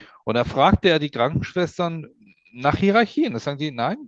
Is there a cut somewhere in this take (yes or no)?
no